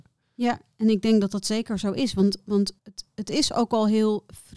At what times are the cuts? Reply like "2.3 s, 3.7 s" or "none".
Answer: 2.8 s